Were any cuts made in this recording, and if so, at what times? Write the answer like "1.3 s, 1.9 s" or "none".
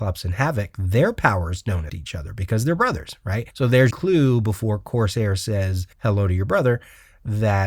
1.9 s, 3.5 s, 3.9 s, 5.9 s

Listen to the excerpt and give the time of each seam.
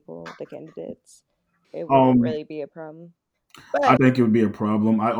1.6 s, 4.0 s

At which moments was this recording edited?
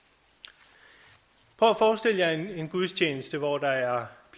none

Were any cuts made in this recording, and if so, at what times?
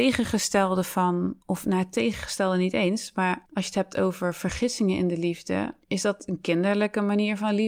1.4 s, 3.4 s, 5.8 s

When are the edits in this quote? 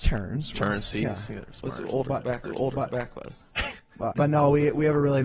2.4 s, 4.1 s

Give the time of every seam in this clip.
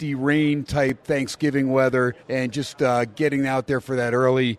2.2 s

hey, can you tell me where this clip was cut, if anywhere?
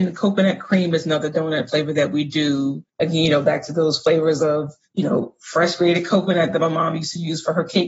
2.9 s

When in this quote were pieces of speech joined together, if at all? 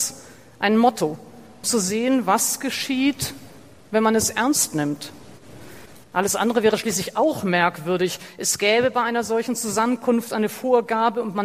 1.6 s, 6.0 s

